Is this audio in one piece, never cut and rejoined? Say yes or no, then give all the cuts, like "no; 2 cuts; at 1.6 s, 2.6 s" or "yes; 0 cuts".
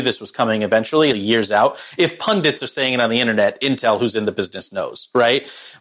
no; 1 cut; at 1.1 s